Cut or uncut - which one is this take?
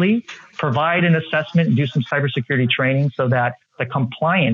uncut